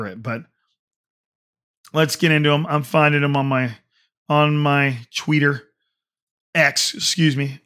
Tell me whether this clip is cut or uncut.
uncut